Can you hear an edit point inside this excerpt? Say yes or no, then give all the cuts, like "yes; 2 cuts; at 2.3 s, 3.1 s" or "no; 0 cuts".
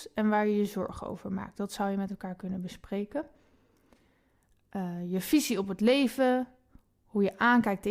no; 0 cuts